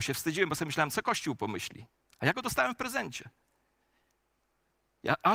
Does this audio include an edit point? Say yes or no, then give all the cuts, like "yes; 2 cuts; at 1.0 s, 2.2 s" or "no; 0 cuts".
no; 0 cuts